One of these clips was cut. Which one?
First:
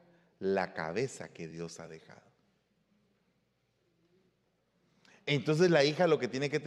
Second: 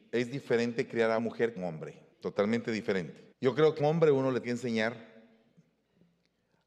second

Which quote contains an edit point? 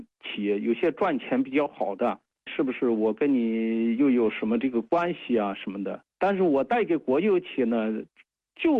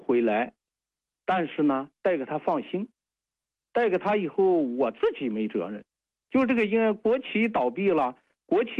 first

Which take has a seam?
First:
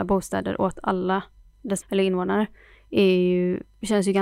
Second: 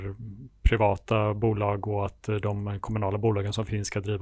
first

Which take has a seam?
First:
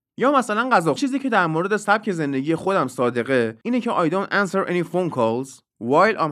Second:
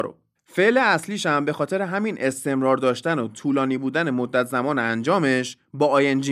first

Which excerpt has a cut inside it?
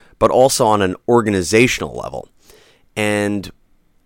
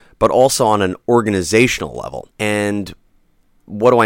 second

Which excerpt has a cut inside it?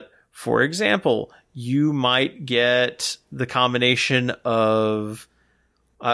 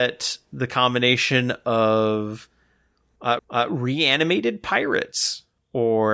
second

